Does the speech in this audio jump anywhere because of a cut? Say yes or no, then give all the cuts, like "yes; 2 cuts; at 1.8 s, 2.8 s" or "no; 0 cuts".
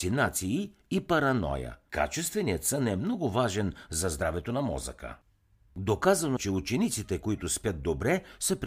yes; 2 cuts; at 1.9 s, 6.4 s